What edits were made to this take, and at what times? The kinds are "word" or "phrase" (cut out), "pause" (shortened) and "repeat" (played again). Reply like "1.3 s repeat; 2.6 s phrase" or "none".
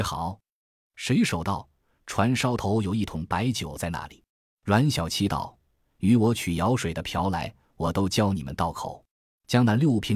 4.3 s pause; 9.1 s pause